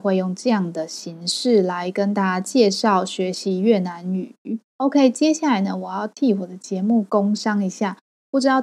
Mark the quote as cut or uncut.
cut